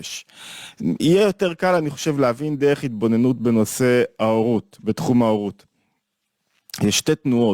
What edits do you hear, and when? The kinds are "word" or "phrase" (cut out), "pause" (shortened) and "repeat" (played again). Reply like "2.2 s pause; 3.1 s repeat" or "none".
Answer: none